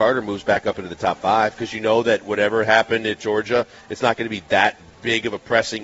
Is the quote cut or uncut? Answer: uncut